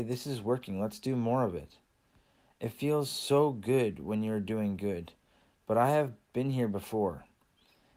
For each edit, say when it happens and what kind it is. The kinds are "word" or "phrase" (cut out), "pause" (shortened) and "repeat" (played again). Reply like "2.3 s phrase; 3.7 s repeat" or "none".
none